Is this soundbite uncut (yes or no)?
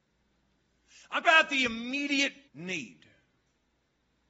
no